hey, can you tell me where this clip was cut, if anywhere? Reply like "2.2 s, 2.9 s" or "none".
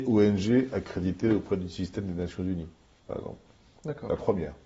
none